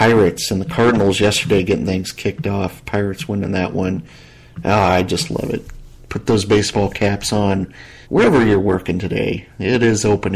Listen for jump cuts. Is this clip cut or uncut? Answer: cut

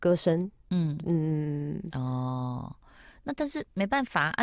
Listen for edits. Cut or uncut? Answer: uncut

